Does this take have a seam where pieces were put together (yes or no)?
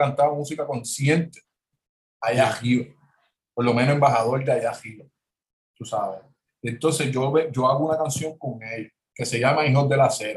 no